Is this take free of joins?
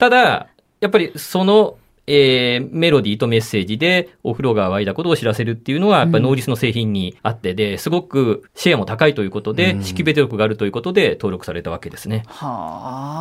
no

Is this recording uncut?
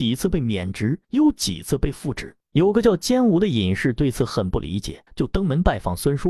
no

